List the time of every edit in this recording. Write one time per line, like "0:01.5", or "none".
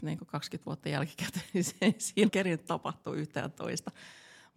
0:02.3